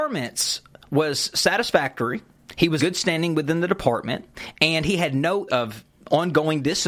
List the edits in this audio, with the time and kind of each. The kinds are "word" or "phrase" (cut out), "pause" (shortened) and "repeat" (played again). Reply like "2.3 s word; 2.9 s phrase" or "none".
2.8 s word; 5.5 s word